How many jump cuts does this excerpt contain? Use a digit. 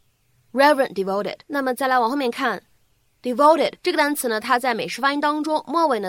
2